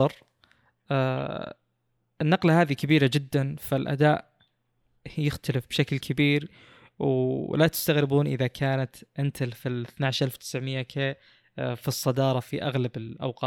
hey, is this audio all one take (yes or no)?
yes